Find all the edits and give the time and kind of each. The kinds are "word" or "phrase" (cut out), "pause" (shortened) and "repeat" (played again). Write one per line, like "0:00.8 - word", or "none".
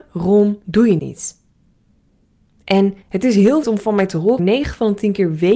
0:01.0 - word
0:03.0 - pause
0:03.6 - word
0:04.4 - word